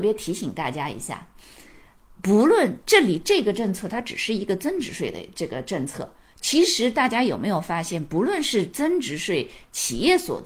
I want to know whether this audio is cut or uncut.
uncut